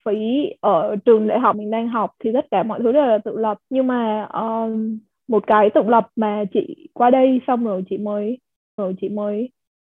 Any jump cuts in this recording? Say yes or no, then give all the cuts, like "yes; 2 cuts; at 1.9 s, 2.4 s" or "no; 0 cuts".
yes; 4 cuts; at 1.5 s, 3.6 s, 5.1 s, 8.8 s